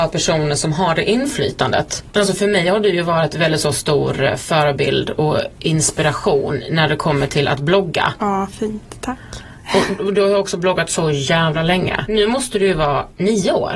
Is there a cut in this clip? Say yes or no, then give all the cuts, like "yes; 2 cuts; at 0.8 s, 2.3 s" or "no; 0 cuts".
no; 0 cuts